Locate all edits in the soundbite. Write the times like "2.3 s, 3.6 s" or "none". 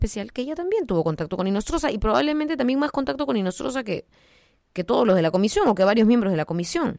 none